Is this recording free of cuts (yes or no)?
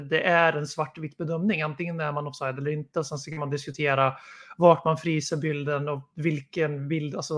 yes